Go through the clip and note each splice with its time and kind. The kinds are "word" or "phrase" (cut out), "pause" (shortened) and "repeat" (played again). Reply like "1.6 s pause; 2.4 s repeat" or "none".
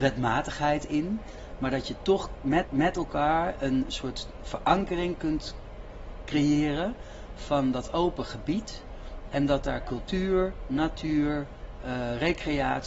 2.6 s repeat